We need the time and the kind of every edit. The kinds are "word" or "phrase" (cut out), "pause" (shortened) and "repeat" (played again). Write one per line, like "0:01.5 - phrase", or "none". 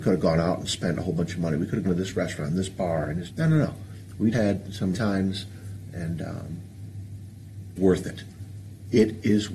0:01.8 - word
0:03.3 - word
0:04.3 - word
0:04.9 - word
0:07.8 - word